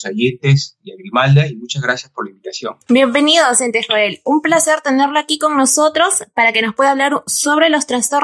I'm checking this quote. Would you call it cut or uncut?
cut